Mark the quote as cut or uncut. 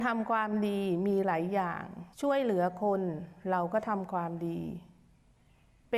cut